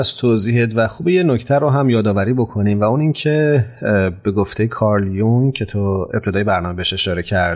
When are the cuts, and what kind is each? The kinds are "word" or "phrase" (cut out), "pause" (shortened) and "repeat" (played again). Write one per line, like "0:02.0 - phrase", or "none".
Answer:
none